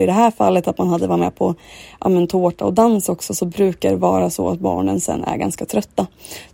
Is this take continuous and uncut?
yes; 0 cuts

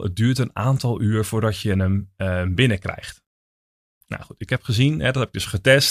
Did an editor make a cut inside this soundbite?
no; 0 cuts

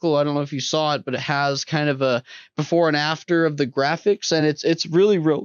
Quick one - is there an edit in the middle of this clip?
no; 0 cuts

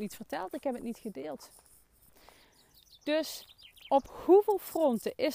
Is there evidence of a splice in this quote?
no; 0 cuts

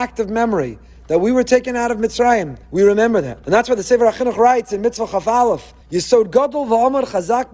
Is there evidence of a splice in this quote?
yes; 3 cuts; at 2.6 s, 3.4 s, 5.8 s

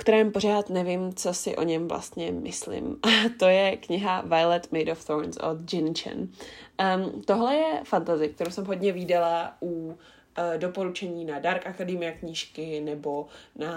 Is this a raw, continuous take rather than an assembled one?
yes; 0 cuts

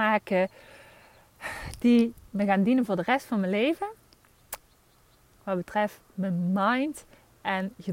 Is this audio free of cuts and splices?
yes; 0 cuts

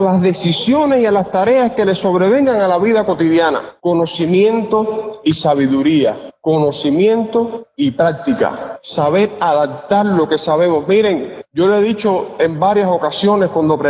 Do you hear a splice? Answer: no; 0 cuts

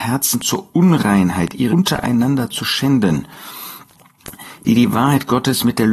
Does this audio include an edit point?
yes; 1 cut; at 1.7 s

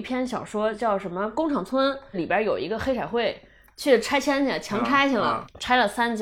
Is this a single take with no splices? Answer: yes; 0 cuts

